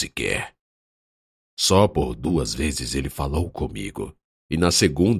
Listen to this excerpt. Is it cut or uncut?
cut